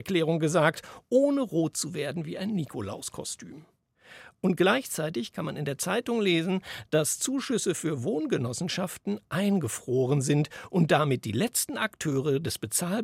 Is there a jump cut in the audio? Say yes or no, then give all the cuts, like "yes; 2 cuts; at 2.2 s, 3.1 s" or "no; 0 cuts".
no; 0 cuts